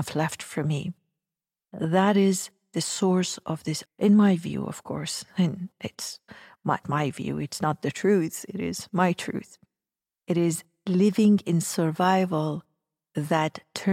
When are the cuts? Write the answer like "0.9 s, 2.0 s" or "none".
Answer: 3.9 s, 6.8 s